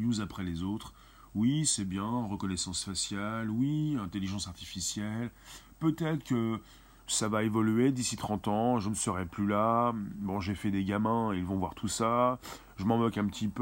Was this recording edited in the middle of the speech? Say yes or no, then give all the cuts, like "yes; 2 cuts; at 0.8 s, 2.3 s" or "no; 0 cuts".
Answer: no; 0 cuts